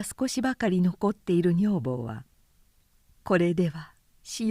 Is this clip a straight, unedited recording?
no; 1 cut; at 2.3 s

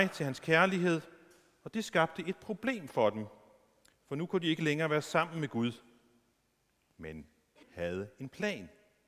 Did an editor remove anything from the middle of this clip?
yes; 1 cut; at 7.6 s

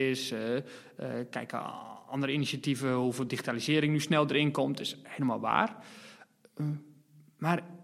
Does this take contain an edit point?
no; 0 cuts

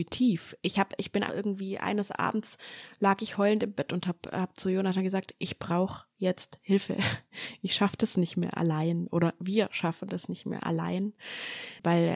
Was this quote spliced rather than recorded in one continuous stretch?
yes; 1 cut; at 1.3 s

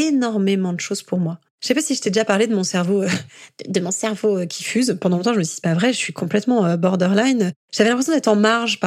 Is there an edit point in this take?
yes; 1 cut; at 1.5 s

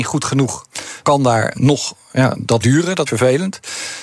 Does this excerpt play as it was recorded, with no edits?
no; 4 cuts; at 1.0 s, 1.5 s, 2.6 s, 3.1 s

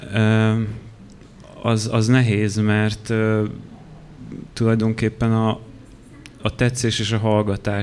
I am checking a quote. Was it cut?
no; 0 cuts

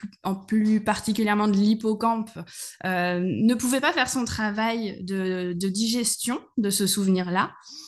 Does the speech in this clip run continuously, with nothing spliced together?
yes; 0 cuts

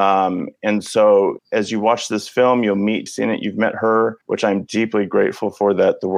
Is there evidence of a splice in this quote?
yes; 3 cuts; at 1.4 s, 3.1 s, 4.2 s

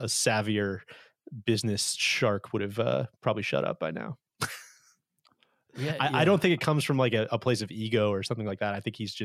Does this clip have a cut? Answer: no; 0 cuts

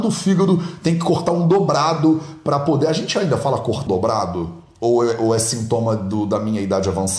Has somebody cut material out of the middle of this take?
yes; 1 cut; at 3.9 s

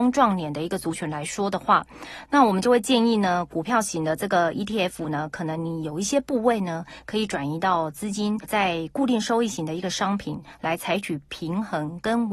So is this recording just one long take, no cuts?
yes; 0 cuts

